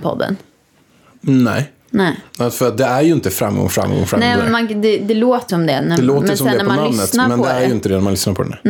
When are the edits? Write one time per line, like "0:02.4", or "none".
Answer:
0:05.5

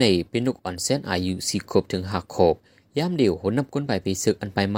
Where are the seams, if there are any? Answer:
none

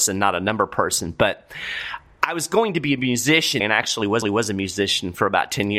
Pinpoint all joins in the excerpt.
0:03.6
0:04.2

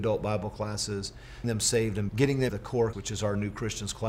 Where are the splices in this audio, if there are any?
0:01.4
0:02.1
0:02.5
0:02.9

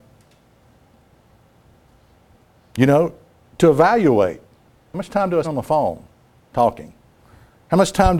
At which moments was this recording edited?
0:05.4

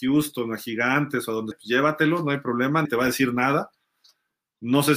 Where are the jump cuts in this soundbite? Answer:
0:01.5
0:02.9

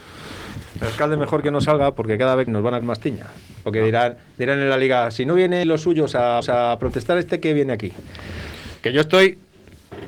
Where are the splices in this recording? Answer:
0:02.5
0:02.8
0:05.6
0:06.4

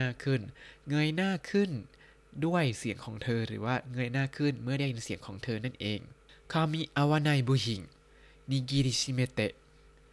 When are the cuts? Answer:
none

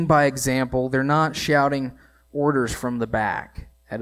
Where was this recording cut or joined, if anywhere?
none

